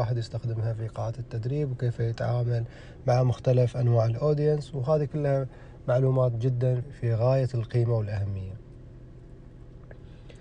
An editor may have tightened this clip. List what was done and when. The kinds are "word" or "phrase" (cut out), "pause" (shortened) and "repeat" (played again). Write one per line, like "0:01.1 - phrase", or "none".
0:06.8 - word